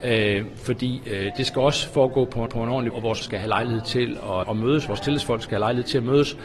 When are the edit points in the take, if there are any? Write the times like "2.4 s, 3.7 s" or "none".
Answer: 2.5 s, 2.9 s, 3.2 s, 4.4 s